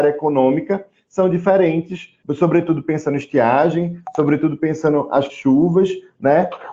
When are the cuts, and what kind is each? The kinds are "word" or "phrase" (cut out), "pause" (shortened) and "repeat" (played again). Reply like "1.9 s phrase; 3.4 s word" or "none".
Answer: 2.2 s pause; 5.3 s word